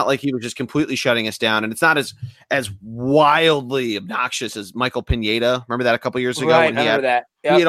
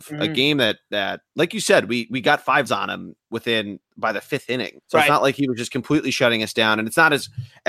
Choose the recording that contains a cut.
second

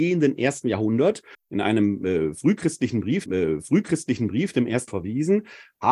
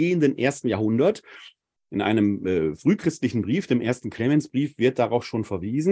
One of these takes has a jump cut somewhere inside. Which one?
first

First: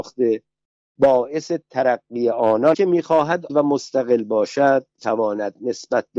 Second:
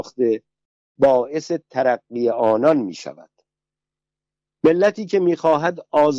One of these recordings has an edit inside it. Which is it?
first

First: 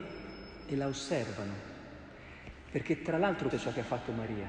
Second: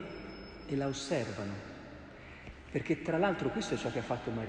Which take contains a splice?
first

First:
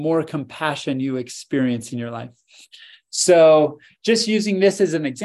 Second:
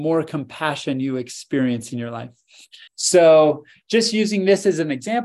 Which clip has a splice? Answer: second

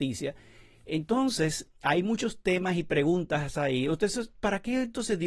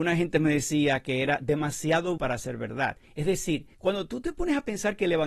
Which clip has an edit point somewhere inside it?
second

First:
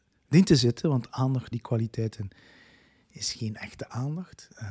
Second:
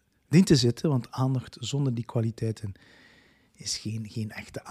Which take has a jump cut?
first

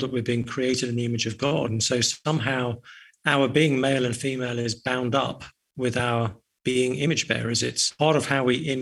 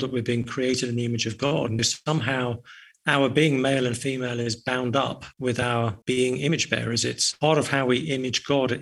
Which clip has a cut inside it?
second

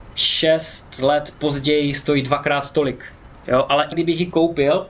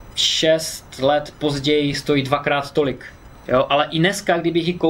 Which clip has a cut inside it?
first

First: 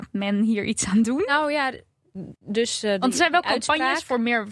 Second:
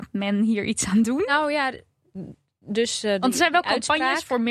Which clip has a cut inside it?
first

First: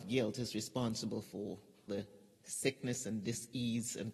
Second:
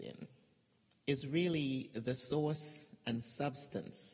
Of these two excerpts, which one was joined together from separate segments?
first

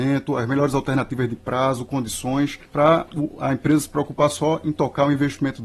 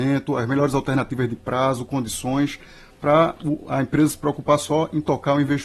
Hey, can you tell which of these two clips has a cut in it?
first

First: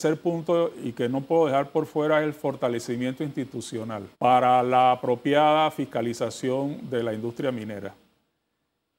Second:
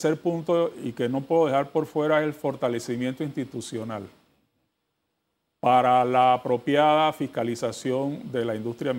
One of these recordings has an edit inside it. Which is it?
first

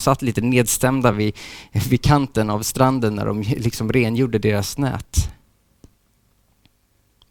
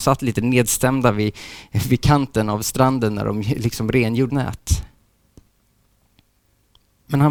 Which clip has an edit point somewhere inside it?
second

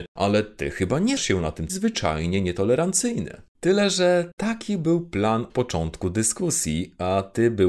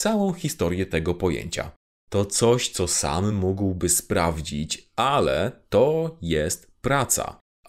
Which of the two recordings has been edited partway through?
first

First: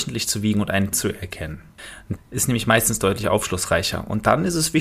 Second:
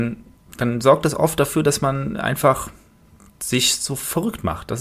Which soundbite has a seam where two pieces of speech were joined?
first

